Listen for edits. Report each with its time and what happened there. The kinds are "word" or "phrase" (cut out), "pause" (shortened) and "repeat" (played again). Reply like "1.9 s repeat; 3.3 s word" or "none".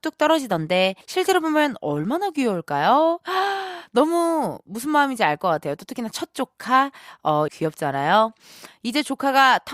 1.0 s pause; 7.5 s phrase